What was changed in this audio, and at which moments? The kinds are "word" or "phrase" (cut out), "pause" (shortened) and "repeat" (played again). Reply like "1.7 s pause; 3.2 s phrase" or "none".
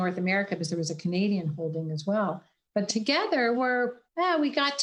2.9 s word; 3.5 s word